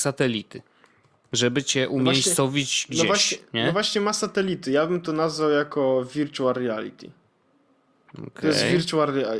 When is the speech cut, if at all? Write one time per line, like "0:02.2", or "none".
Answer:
none